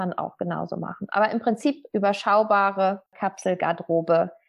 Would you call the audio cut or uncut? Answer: uncut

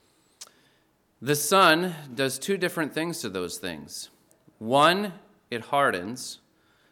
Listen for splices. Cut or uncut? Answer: uncut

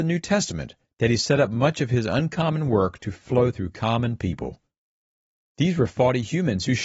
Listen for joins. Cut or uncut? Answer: uncut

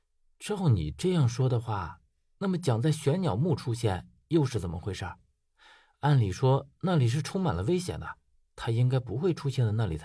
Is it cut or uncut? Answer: uncut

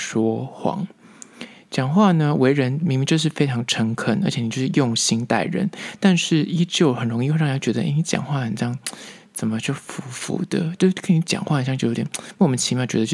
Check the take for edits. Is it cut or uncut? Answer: uncut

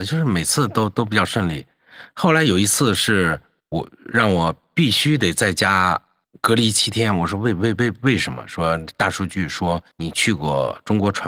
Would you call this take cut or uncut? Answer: cut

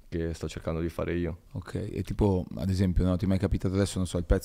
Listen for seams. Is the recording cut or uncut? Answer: cut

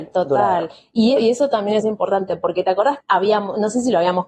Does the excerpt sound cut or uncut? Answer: cut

